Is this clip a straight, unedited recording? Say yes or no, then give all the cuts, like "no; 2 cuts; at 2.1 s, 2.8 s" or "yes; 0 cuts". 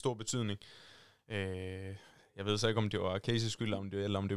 yes; 0 cuts